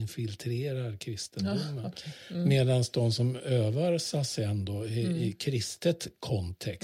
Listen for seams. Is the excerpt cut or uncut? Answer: uncut